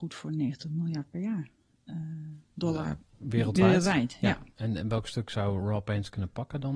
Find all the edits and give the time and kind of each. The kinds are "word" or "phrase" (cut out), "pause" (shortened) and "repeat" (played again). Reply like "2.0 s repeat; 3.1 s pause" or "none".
none